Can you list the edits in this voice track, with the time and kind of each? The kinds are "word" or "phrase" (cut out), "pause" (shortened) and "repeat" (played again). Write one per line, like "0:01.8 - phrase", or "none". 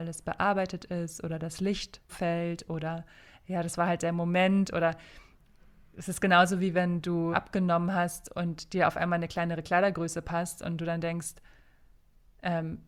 0:02.1 - word
0:07.3 - word